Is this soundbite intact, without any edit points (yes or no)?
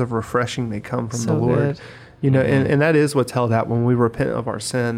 yes